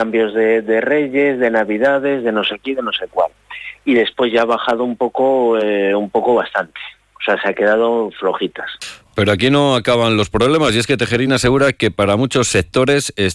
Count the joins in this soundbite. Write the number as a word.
zero